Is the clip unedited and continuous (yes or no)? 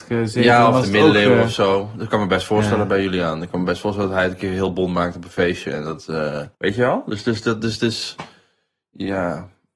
no